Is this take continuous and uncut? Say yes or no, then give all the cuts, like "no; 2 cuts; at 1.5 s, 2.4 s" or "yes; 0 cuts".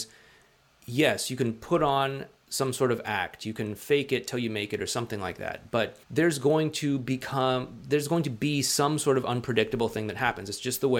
no; 1 cut; at 6.0 s